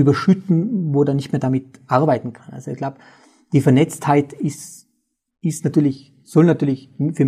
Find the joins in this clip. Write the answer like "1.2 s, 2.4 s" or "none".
none